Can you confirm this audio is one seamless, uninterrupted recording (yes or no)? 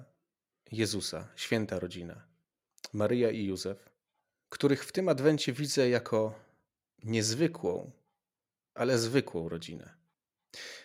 yes